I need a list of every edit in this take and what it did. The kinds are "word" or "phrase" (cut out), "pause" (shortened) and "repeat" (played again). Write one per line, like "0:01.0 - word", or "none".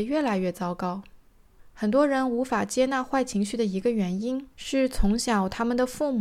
0:04.5 - pause